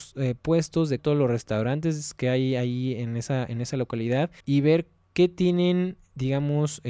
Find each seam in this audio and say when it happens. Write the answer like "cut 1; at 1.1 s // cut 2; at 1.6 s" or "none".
cut 1; at 1.0 s // cut 2; at 4.4 s

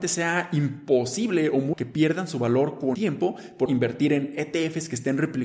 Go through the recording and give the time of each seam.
cut 1; at 1.7 s // cut 2; at 2.9 s // cut 3; at 3.7 s

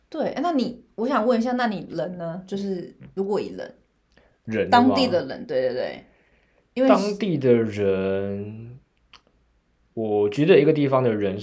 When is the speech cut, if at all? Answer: none

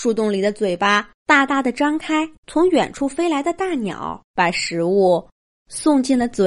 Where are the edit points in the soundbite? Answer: cut 1; at 1.2 s // cut 2; at 2.4 s // cut 3; at 4.2 s

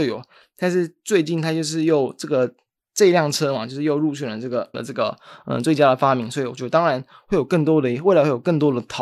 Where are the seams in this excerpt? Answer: cut 1; at 4.7 s

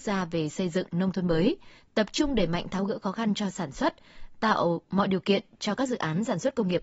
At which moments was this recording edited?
none

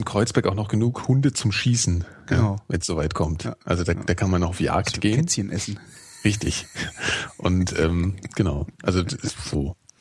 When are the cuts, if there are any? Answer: none

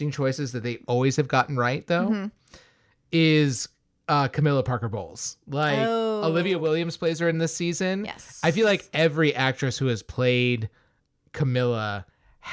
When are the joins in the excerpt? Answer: none

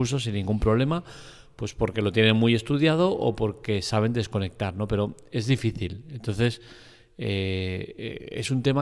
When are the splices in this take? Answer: none

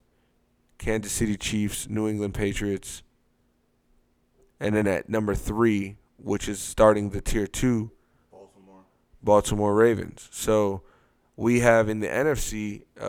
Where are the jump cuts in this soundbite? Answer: none

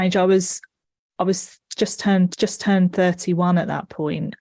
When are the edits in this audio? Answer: cut 1; at 2.3 s

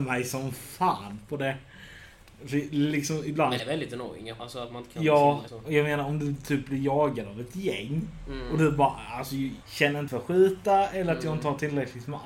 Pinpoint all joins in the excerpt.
cut 1; at 3.6 s // cut 2; at 4.4 s // cut 3; at 5.5 s // cut 4; at 9.6 s // cut 5; at 10.1 s

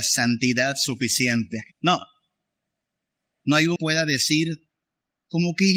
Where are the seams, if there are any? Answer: cut 1; at 1.7 s // cut 2; at 3.8 s

